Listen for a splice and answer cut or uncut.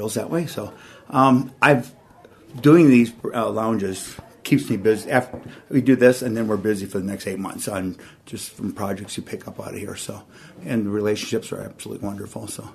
uncut